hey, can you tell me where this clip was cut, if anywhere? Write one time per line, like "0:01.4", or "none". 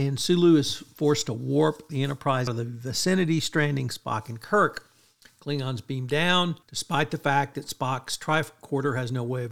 0:02.5
0:06.6